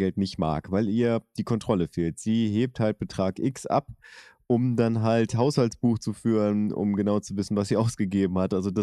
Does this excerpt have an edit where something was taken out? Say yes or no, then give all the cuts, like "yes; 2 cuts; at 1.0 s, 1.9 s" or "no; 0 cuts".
no; 0 cuts